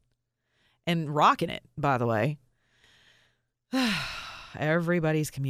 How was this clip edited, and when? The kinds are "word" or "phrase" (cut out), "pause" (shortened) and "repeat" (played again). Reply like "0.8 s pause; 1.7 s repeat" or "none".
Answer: none

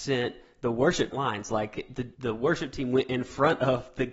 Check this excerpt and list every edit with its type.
1.1 s phrase; 2.1 s pause

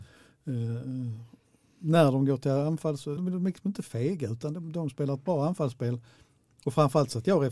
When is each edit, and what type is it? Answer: 3.2 s word

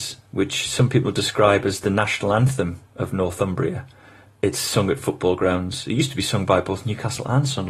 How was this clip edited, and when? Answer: none

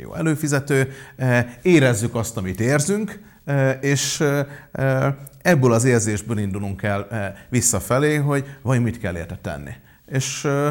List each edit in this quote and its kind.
none

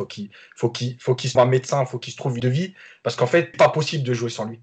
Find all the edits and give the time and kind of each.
1.3 s word; 2.4 s word; 3.5 s word

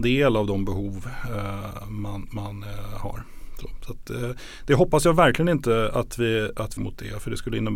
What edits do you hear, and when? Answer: 6.8 s phrase

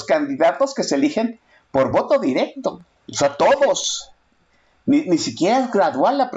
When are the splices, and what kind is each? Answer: none

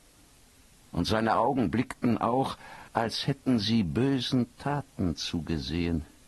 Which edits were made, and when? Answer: 2.9 s pause

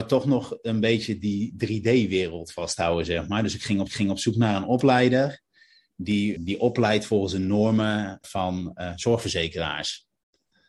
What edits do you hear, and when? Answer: 3.9 s repeat; 6.3 s word; 8.2 s word

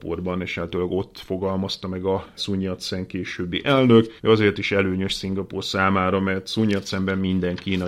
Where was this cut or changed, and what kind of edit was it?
2.4 s word; 4.2 s pause

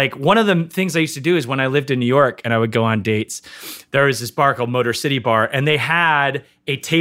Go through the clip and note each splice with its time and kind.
none

